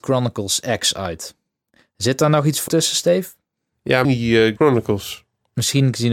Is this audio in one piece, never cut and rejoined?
no; 3 cuts; at 2.7 s, 4.0 s, 4.6 s

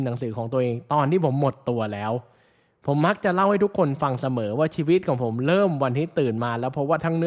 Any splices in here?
no; 0 cuts

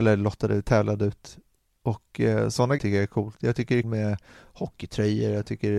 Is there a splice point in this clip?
yes; 2 cuts; at 2.8 s, 3.8 s

